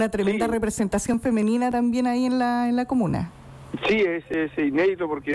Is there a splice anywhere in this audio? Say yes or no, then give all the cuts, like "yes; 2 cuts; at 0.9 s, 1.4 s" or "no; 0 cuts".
no; 0 cuts